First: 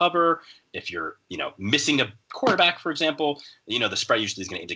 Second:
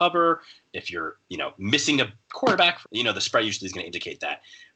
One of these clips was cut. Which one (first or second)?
second